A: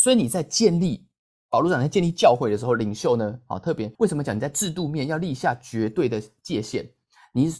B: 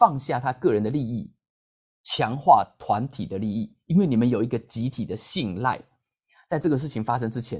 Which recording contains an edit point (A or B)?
A